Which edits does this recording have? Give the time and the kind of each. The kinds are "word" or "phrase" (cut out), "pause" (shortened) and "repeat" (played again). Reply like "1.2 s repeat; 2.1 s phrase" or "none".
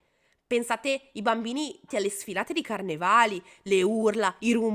1.9 s word

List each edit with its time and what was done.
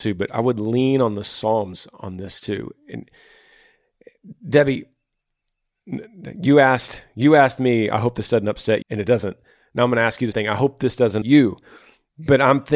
8.8 s word; 10.3 s word; 11.2 s word

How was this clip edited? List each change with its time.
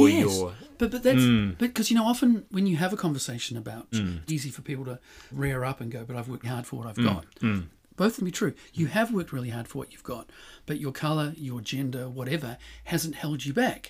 3.9 s word; 4.3 s word; 5.3 s phrase; 6.4 s word; 8.2 s phrase

